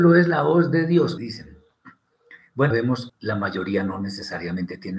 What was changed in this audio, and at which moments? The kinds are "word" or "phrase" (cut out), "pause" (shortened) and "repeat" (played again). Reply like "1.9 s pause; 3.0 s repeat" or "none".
1.2 s word; 2.7 s word; 3.1 s word

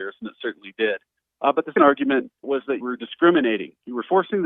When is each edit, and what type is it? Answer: 1.8 s word; 2.4 s word; 2.8 s word

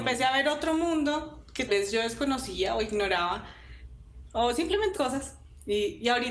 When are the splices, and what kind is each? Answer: 1.7 s word; 4.9 s phrase

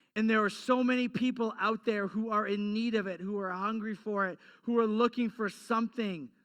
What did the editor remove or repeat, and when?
none

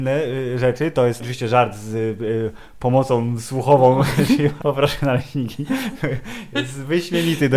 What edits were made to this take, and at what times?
1.2 s phrase; 4.6 s word

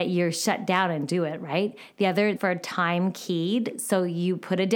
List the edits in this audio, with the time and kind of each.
1.1 s word; 2.4 s phrase

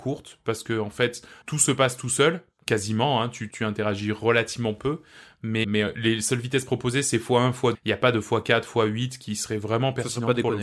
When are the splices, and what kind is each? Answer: 1.4 s word; 3.5 s word; 5.6 s word; 7.7 s word

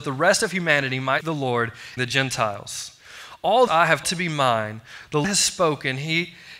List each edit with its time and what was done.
1.2 s word; 2.0 s word; 3.7 s word; 4.0 s word; 5.2 s word

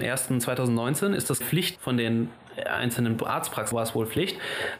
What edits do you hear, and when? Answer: 1.4 s word; 1.8 s word; 3.7 s word

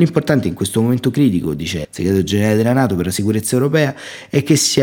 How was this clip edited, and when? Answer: 1.8 s word

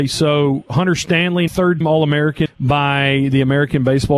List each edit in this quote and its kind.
1.5 s word; 1.8 s word; 2.5 s word

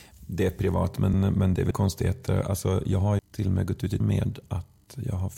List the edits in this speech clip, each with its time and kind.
1.1 s word; 1.7 s word; 3.2 s word; 4.0 s word

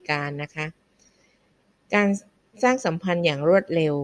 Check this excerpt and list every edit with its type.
none

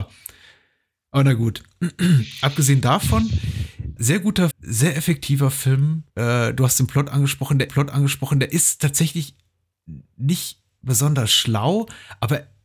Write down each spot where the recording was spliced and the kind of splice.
4.0 s word; 4.5 s word; 6.1 s pause; 7.7 s repeat

